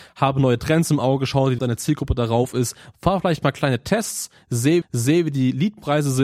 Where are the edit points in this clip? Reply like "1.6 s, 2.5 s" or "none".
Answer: 1.6 s, 4.8 s